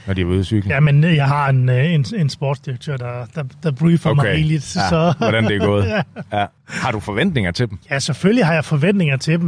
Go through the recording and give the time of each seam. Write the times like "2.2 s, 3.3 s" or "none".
6.6 s, 7.8 s